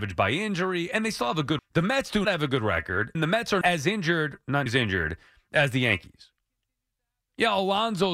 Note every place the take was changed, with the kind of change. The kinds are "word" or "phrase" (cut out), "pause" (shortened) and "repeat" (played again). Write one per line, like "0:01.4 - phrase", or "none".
0:01.6 - word
0:02.2 - word
0:03.1 - word
0:03.6 - word
0:04.7 - word